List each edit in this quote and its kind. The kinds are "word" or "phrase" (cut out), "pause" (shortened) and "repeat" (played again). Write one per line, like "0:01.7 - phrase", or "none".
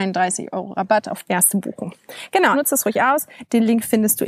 0:01.2 - word
0:02.5 - word